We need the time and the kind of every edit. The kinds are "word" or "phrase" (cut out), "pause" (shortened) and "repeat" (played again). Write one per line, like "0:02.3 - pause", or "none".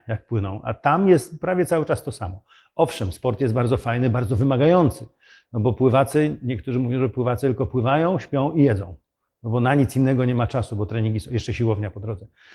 none

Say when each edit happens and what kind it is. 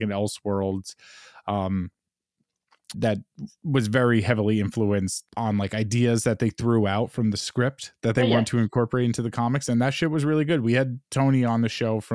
0:02.9 - word
0:05.3 - pause

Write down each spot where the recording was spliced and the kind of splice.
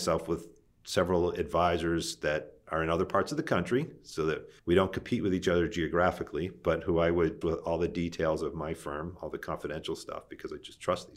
0:04.6 - pause
0:07.4 - word

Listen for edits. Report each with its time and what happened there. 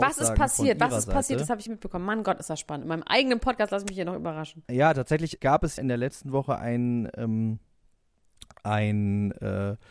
0:01.7 - phrase
0:04.6 - pause
0:05.4 - word
0:05.8 - word

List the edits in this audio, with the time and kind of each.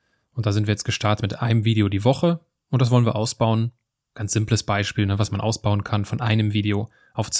none

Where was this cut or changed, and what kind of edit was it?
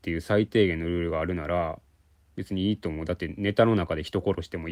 none

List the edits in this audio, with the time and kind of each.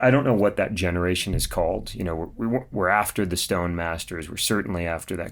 0:02.7 - word

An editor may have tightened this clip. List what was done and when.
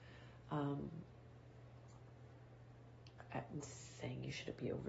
0:03.6 - word

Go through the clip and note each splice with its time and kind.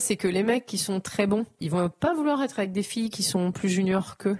0:01.6 - word

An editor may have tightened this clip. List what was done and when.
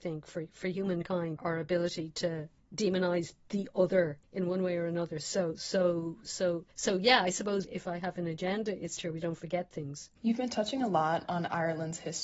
0:01.4 - word
0:02.6 - pause
0:04.2 - pause
0:06.7 - pause
0:07.6 - word
0:09.0 - phrase
0:10.2 - pause

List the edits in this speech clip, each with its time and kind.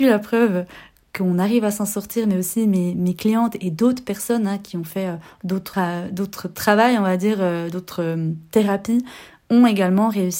0:05.7 - phrase

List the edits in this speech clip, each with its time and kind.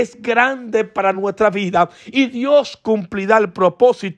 none

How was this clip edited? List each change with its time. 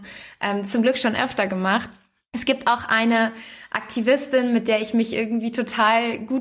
none

